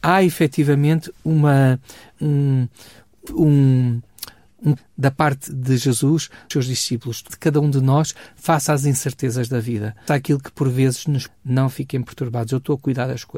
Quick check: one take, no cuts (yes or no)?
no